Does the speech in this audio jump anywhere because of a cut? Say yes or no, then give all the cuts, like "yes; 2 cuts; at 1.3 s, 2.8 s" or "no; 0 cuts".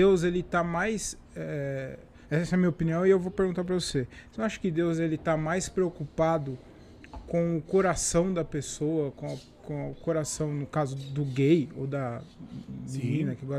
yes; 1 cut; at 2.2 s